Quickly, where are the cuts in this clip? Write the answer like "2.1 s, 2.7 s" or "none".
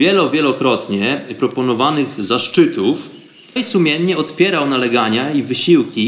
3.6 s